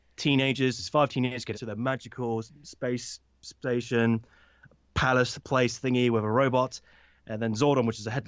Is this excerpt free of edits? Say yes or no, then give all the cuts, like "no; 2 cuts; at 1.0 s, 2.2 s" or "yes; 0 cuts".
no; 1 cut; at 1.5 s